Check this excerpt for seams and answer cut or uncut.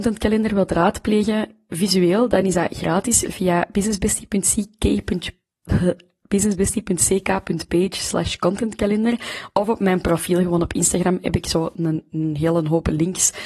uncut